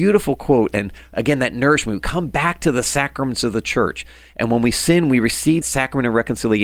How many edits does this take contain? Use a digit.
1